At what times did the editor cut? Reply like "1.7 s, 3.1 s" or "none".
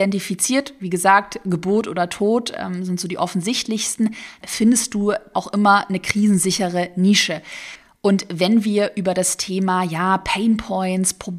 4.4 s, 5.3 s